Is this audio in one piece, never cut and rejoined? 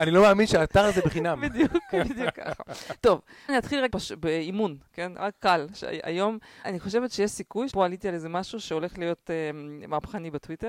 no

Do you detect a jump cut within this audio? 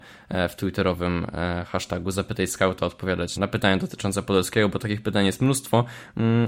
yes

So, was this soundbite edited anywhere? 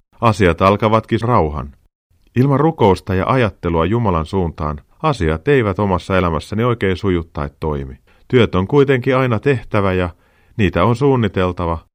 yes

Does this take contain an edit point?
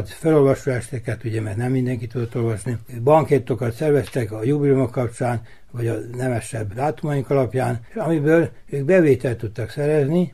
no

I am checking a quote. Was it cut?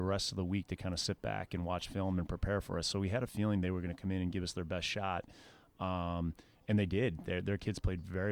no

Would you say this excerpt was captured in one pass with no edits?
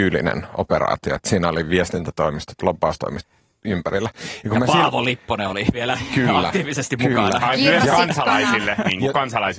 yes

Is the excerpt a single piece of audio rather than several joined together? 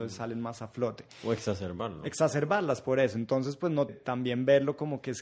no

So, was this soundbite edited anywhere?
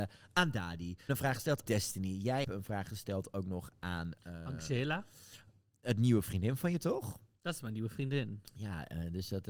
yes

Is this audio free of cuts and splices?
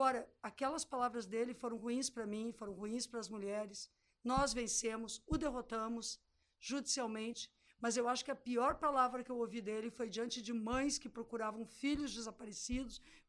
yes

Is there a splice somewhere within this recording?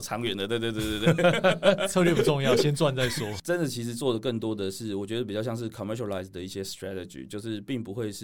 no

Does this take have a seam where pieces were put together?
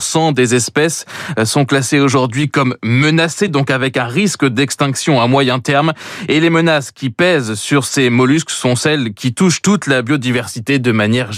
no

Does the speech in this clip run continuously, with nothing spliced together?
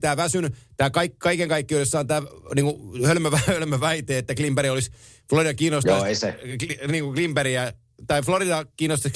yes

